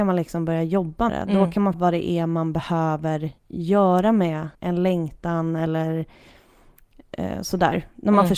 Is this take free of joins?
no; 4 cuts; at 1.1 s, 1.7 s, 3.4 s, 4.5 s

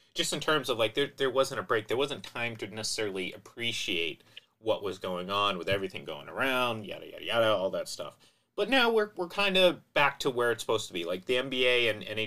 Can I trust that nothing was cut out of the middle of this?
yes; 0 cuts

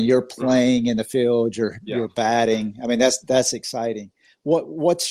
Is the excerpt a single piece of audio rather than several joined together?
yes; 0 cuts

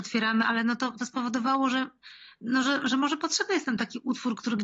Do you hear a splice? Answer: no; 0 cuts

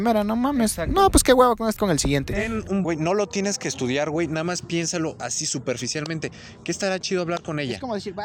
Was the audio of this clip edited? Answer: yes; 2 cuts; at 1.8 s, 2.8 s

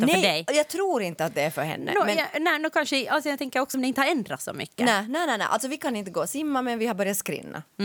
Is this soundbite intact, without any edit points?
no; 1 cut; at 3.7 s

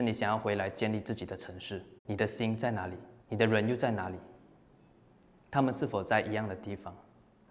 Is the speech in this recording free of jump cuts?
no; 2 cuts; at 2.0 s, 3.2 s

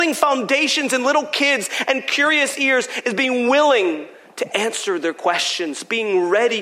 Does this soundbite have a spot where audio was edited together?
no; 0 cuts

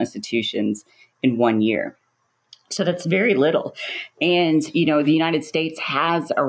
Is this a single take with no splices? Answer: yes; 0 cuts

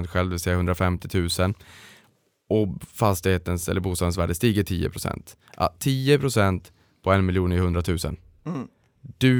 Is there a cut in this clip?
no; 0 cuts

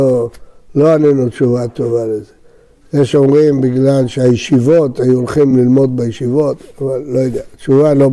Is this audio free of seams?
yes; 0 cuts

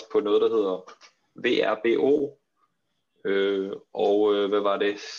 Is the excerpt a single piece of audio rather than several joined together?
yes; 0 cuts

